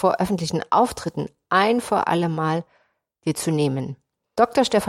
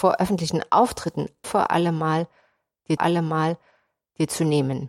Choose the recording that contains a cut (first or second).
second